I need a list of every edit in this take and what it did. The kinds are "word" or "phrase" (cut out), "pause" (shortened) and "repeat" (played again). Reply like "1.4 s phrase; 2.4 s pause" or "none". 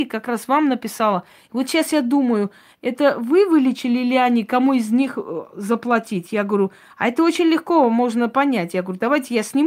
none